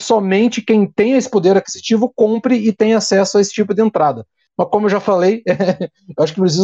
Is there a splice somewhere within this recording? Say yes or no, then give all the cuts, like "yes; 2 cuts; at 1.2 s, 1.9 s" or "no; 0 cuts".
no; 0 cuts